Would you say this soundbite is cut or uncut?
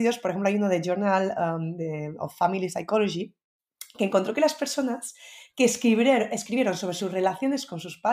uncut